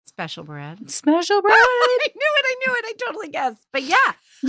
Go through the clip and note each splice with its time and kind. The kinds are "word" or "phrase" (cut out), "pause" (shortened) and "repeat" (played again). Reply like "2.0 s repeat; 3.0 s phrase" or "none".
none